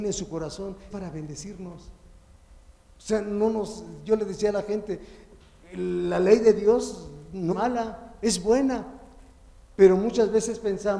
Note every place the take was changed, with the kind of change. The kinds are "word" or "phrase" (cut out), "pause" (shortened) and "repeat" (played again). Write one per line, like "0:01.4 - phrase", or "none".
0:00.9 - word
0:07.5 - word